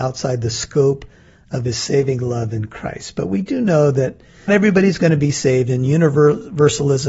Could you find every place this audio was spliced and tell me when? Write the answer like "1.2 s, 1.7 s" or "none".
4.5 s